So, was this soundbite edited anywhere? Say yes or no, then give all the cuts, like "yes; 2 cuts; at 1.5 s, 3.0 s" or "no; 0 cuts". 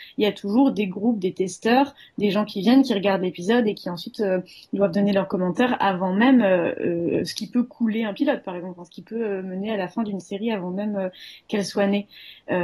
no; 0 cuts